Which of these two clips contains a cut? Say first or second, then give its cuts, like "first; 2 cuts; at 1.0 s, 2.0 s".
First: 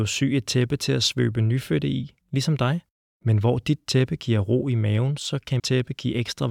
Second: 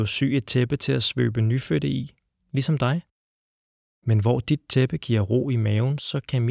first; 3 cuts; at 2.2 s, 2.9 s, 5.6 s